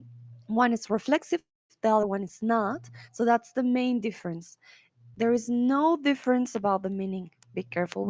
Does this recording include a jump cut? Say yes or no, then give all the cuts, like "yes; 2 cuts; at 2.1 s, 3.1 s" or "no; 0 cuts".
no; 0 cuts